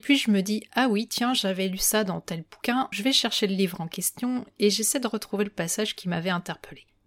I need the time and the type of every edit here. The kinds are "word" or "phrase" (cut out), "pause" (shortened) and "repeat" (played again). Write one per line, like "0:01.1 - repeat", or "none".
0:02.9 - word